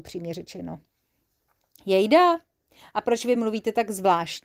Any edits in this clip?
no; 0 cuts

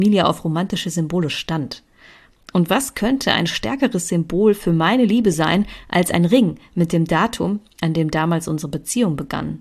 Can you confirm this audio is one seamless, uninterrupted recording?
yes; 0 cuts

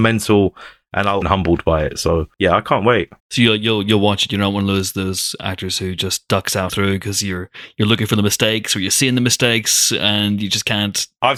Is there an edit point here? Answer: yes; 4 cuts; at 1.2 s, 2.3 s, 3.2 s, 6.7 s

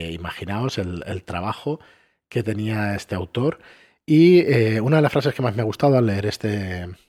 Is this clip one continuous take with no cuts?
yes; 0 cuts

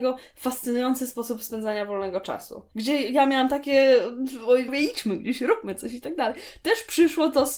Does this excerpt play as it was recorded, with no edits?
no; 1 cut; at 4.7 s

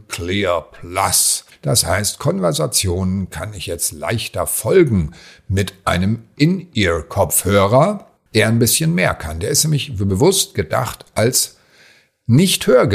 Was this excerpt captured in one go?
yes; 0 cuts

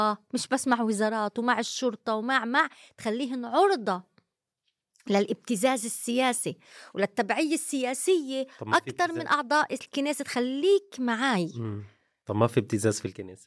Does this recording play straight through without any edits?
yes; 0 cuts

